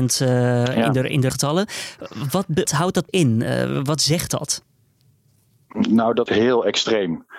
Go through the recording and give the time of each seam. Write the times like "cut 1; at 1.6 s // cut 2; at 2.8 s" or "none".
cut 1; at 1.3 s // cut 2; at 2.6 s // cut 3; at 3.1 s // cut 4; at 6.3 s